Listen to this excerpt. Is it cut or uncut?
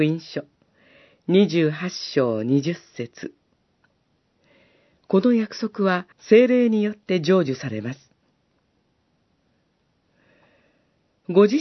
cut